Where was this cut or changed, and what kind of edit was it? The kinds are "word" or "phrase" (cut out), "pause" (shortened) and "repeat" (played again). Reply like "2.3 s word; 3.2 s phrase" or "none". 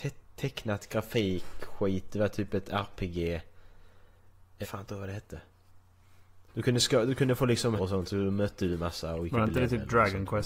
4.6 s phrase; 6.5 s pause; 7.8 s word